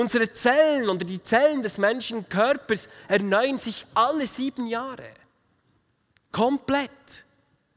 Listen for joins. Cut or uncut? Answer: uncut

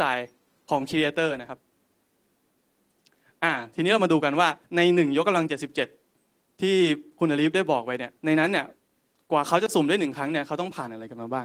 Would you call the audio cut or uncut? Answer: cut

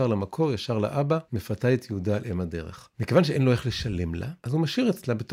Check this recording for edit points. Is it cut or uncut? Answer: cut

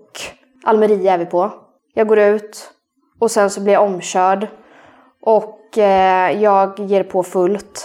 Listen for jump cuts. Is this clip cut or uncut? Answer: uncut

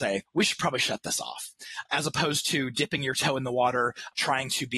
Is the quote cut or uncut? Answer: uncut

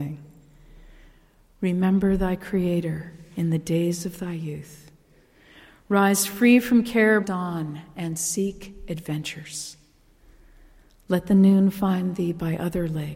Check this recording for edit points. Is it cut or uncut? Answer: cut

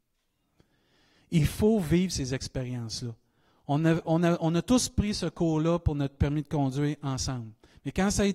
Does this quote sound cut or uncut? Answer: uncut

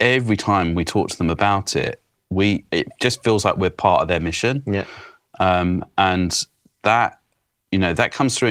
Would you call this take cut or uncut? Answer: uncut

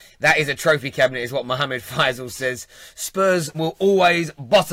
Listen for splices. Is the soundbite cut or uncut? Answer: cut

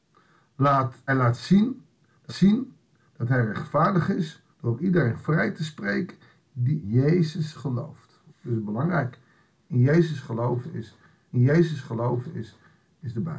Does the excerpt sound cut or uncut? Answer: cut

